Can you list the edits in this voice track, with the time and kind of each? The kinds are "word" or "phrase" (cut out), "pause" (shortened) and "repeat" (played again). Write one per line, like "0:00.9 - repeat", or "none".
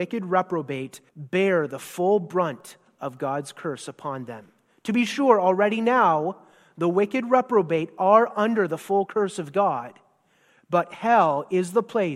0:01.1 - pause